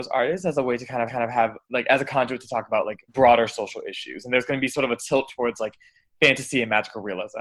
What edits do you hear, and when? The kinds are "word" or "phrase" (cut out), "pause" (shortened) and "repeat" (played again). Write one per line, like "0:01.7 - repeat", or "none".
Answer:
0:01.1 - repeat
0:03.1 - pause